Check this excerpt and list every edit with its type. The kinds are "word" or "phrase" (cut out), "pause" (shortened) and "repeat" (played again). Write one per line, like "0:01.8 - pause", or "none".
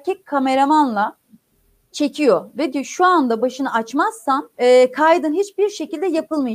0:01.9 - word
0:02.7 - word
0:03.4 - word
0:04.5 - pause